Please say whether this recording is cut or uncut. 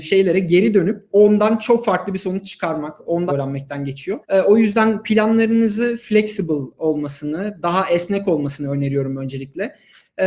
cut